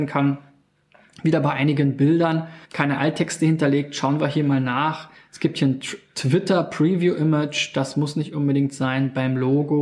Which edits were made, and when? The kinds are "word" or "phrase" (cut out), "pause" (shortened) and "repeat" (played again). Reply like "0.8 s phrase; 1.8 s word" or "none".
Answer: 2.6 s pause